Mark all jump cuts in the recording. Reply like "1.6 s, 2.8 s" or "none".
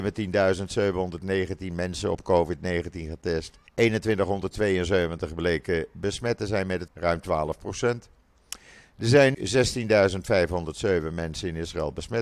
3.7 s, 6.9 s, 9.3 s